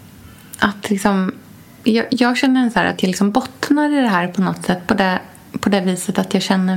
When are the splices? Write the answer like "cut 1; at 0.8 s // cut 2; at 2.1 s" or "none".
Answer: none

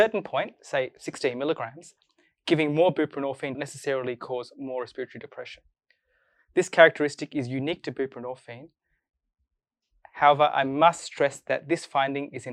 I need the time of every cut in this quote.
cut 1; at 3.5 s

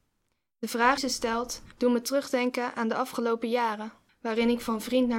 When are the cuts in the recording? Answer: cut 1; at 1.0 s // cut 2; at 1.7 s // cut 3; at 4.1 s

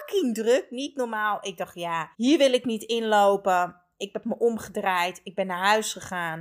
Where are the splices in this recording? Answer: cut 1; at 2.1 s

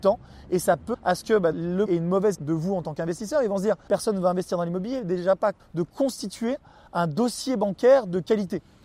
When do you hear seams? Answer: cut 1; at 0.9 s // cut 2; at 1.5 s // cut 3; at 1.9 s // cut 4; at 2.3 s // cut 5; at 3.9 s // cut 6; at 5.6 s

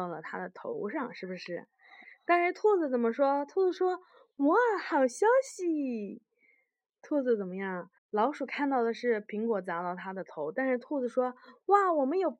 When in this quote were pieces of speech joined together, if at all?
cut 1; at 8.0 s

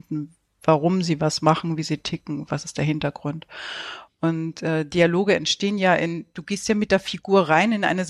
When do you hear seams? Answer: none

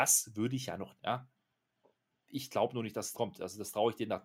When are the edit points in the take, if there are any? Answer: cut 1; at 1.0 s // cut 2; at 3.1 s

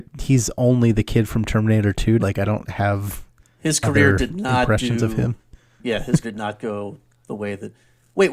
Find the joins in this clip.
cut 1; at 2.2 s // cut 2; at 6.2 s

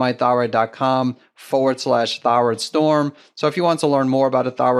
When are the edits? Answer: none

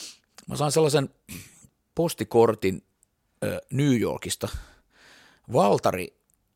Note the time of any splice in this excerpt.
none

